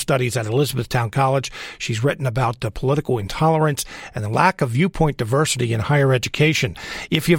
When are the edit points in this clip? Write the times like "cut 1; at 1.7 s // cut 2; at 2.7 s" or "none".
none